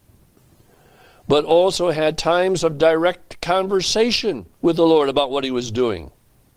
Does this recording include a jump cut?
yes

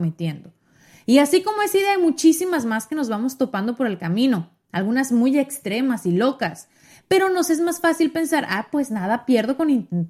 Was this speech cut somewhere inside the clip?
no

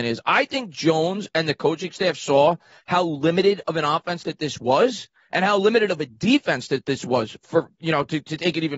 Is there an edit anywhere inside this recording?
no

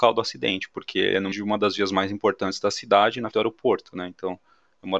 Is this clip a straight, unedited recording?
no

